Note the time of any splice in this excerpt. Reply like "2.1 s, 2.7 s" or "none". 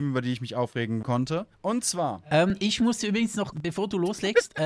1.0 s, 1.5 s, 3.5 s